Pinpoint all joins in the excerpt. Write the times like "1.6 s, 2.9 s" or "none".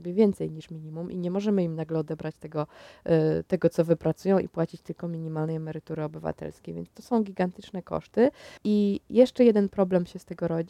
8.6 s

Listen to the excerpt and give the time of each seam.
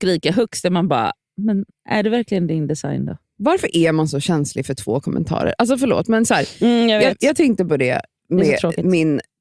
1.7 s

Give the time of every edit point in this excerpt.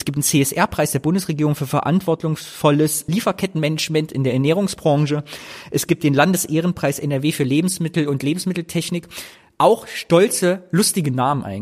3.1 s

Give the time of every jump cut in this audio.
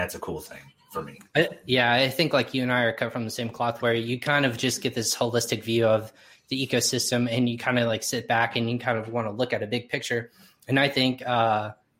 none

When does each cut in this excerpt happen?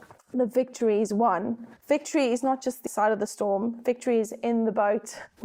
1.8 s, 2.9 s

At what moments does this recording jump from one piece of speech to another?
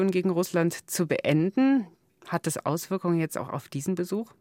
none

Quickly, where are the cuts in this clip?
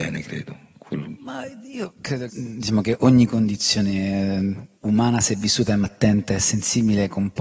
2.3 s, 4.8 s, 5.8 s

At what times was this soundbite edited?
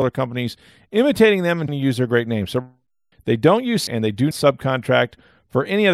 1.7 s, 3.1 s, 3.9 s, 4.3 s

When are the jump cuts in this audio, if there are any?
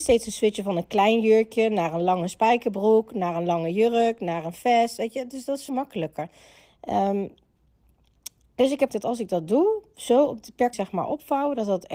5.7 s, 8.9 s, 10.7 s

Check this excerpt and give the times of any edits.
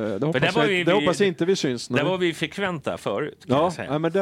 none

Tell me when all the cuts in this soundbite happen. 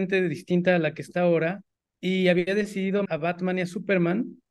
1.8 s, 3.1 s

